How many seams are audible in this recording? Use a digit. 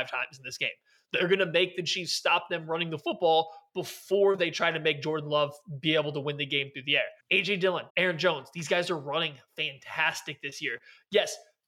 2